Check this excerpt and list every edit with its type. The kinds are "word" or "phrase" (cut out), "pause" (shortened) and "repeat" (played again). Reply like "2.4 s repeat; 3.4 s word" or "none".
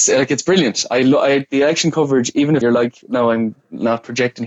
2.6 s word